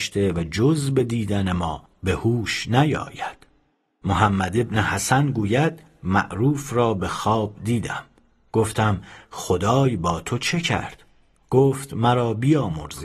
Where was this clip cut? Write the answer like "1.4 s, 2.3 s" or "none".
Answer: none